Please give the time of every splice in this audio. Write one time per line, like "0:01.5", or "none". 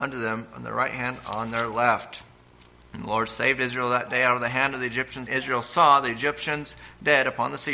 0:05.3

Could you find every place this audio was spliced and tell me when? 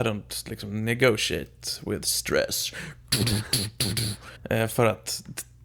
0:04.4

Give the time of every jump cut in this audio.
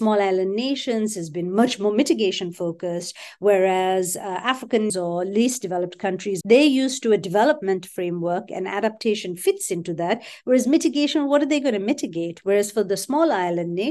0:04.9
0:06.4

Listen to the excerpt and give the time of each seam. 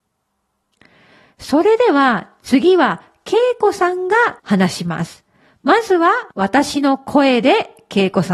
0:04.4
0:06.3

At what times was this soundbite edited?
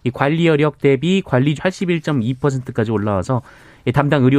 0:01.6

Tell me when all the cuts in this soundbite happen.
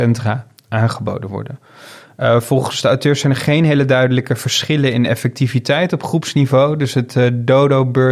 none

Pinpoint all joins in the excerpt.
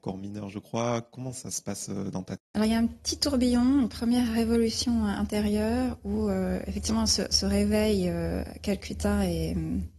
0:02.4

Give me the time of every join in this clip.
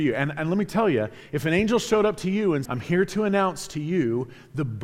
0:02.7

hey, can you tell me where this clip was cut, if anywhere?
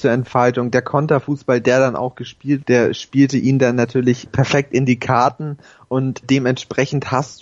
0:02.6
0:04.3
0:06.2

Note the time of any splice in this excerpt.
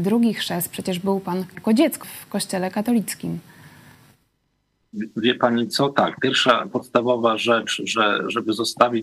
0:01.5
0:02.0
0:06.7

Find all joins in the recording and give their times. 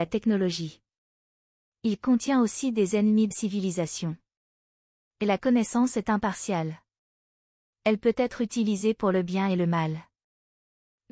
0:03.3

